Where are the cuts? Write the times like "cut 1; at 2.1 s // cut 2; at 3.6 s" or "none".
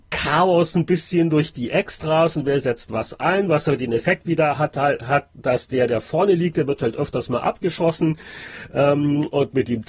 none

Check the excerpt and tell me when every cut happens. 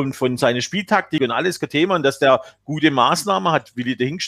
none

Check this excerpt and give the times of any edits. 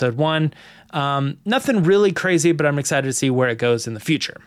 none

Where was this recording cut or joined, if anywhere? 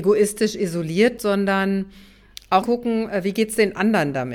cut 1; at 1.2 s // cut 2; at 2.6 s

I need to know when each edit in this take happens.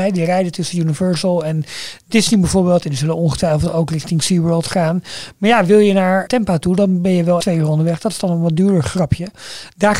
cut 1; at 6.3 s // cut 2; at 7.4 s

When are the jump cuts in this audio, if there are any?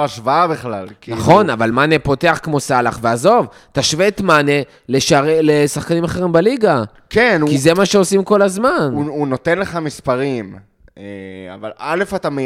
none

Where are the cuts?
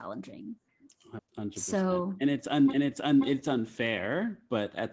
cut 1; at 1.2 s // cut 2; at 2.7 s

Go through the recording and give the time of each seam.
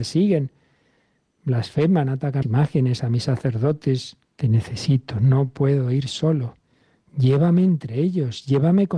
cut 1; at 2.4 s // cut 2; at 4.3 s

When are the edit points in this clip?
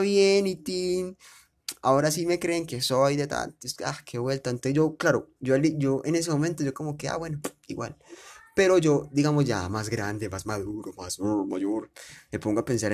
cut 1; at 5.4 s

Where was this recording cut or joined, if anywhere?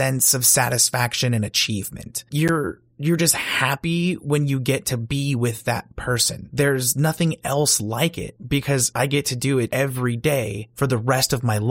none

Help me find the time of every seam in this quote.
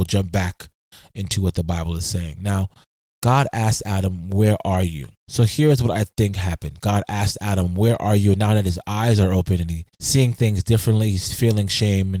cut 1; at 5.2 s // cut 2; at 9.9 s

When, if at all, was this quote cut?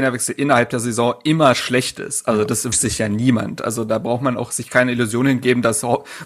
cut 1; at 2.7 s

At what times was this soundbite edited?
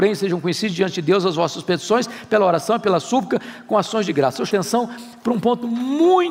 cut 1; at 4.5 s

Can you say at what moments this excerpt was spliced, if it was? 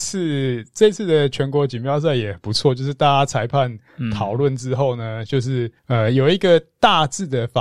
cut 1; at 5.8 s

